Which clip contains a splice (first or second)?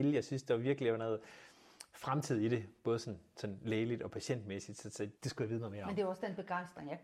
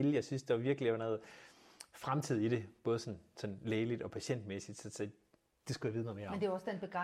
first